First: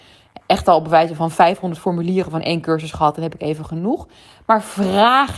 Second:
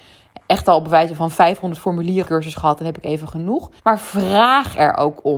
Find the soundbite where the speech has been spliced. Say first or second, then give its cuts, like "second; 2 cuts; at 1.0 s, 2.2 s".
second; 2 cuts; at 2.3 s, 3.8 s